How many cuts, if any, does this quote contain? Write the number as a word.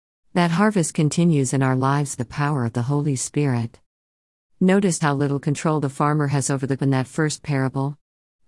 three